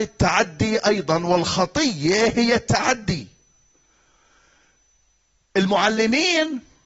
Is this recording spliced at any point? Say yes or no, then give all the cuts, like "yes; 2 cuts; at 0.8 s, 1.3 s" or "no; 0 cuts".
no; 0 cuts